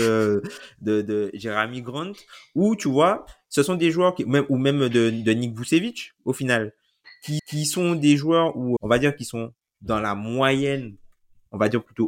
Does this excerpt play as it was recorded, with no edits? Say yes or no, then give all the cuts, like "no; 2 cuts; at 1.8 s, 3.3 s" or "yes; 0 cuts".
no; 2 cuts; at 7.4 s, 8.8 s